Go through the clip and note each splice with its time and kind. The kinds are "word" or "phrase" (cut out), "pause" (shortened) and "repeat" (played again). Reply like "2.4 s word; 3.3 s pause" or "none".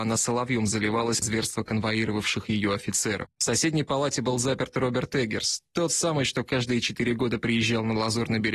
1.2 s word